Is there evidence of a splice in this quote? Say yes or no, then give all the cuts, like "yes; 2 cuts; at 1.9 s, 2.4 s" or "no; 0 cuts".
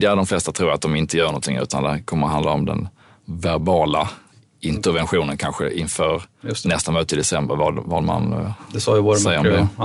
no; 0 cuts